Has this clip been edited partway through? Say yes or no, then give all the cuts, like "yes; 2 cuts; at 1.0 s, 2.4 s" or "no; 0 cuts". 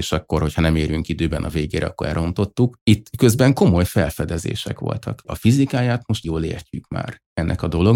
yes; 1 cut; at 6.2 s